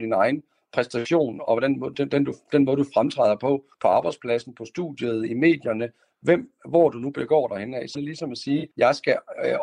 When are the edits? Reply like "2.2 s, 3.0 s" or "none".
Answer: 1.9 s, 3.7 s, 7.9 s, 8.7 s

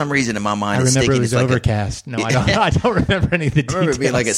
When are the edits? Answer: none

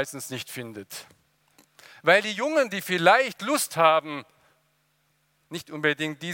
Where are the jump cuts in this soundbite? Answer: none

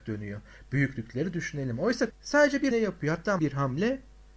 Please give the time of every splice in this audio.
2.1 s, 2.7 s, 3.4 s

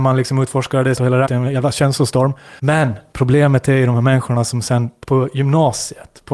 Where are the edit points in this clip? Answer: 1.0 s, 1.3 s, 2.6 s, 5.0 s

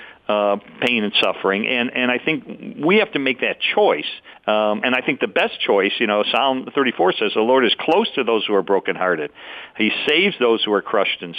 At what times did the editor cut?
4.8 s

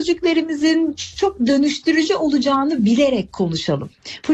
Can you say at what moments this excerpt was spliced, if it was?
none

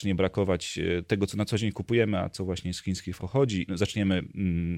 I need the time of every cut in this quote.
3.2 s, 3.7 s

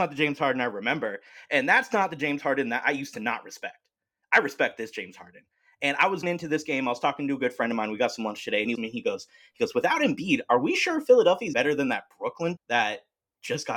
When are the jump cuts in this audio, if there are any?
6.2 s, 8.7 s, 11.5 s, 12.6 s

